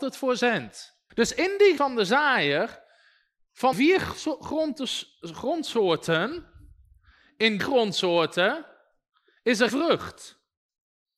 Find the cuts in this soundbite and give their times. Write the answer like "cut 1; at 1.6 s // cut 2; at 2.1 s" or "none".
cut 1; at 1.1 s // cut 2; at 1.8 s // cut 3; at 3.7 s // cut 4; at 7.6 s // cut 5; at 9.7 s